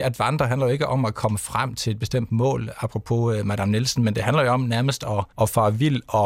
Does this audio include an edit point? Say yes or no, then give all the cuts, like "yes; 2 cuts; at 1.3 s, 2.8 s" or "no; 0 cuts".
yes; 1 cut; at 5.3 s